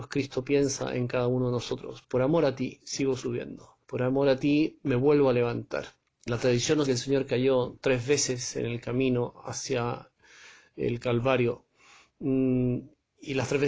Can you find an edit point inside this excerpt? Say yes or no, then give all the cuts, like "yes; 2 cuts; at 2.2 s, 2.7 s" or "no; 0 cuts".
yes; 3 cuts; at 3.8 s, 6.1 s, 6.8 s